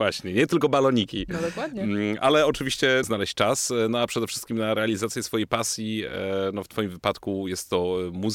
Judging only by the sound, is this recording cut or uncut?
cut